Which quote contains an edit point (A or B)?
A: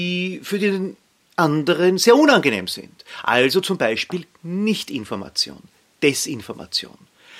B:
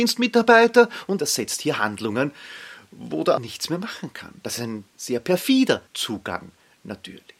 B